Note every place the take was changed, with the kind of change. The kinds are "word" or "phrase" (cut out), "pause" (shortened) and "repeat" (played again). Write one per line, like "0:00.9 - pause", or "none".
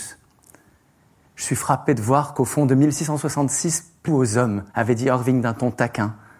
0:04.1 - word
0:04.7 - pause